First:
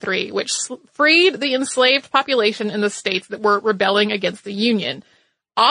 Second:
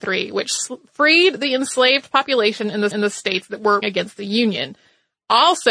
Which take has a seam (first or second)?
second